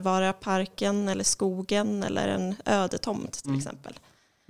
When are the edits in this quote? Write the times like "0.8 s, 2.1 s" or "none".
none